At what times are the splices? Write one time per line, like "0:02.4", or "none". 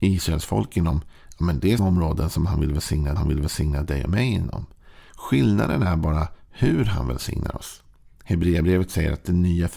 0:01.8
0:03.2
0:05.1